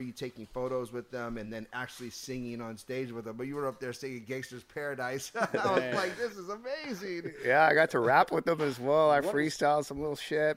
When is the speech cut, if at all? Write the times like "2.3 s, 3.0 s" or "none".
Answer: none